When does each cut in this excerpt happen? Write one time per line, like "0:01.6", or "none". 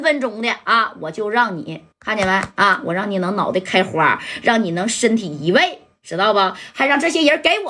0:01.9